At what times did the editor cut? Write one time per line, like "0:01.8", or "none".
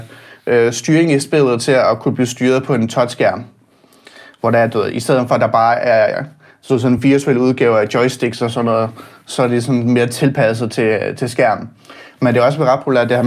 none

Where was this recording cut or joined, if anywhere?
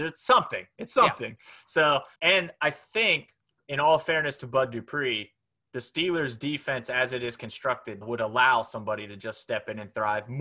0:02.1
0:03.4
0:08.0

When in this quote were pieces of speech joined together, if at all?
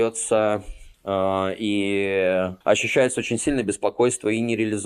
0:00.9
0:02.6

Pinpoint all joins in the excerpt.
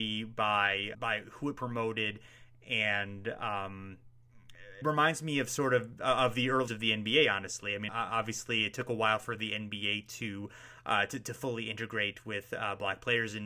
0:00.9
0:04.8
0:06.7
0:07.9

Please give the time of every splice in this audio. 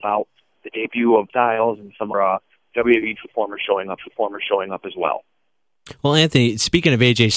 0:01.3
0:02.1
0:04.0

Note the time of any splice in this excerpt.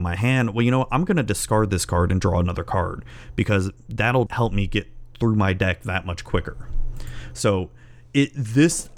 0:04.3

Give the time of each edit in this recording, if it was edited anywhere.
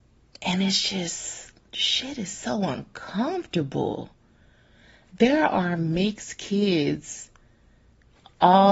none

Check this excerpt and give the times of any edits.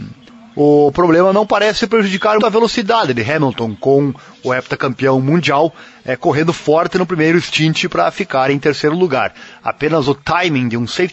0:02.4

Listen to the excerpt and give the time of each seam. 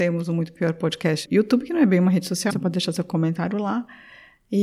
0:01.3
0:02.5

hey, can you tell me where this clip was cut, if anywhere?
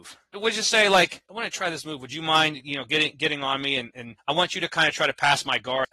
none

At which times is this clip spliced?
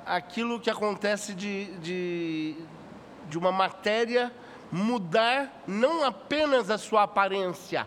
none

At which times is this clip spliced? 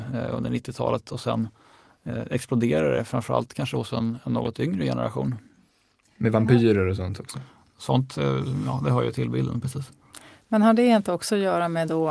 none

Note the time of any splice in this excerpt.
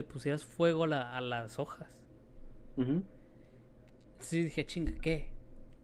none

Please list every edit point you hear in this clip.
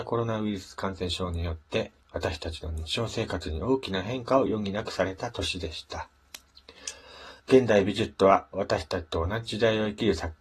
0:02.0
0:07.4

